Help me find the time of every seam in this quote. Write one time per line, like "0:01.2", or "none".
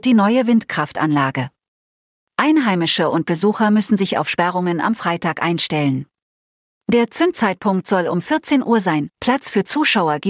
none

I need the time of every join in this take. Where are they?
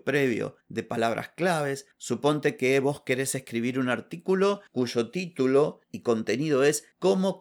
0:04.7

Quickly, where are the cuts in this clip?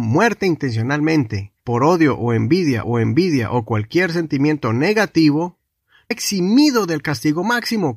0:01.6
0:02.8
0:06.1

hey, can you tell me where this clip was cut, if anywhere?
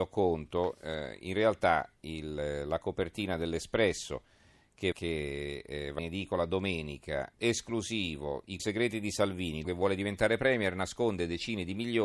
0:04.9
0:06.0
0:07.3
0:08.6
0:09.6

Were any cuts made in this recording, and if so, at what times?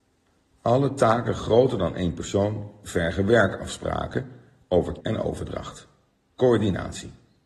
0:05.0

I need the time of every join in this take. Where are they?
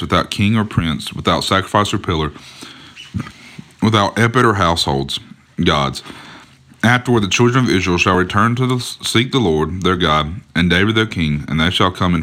none

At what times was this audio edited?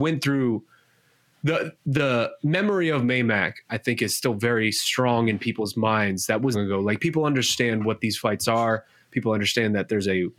0:06.5

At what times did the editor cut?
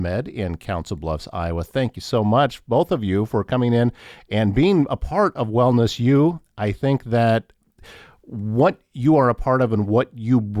none

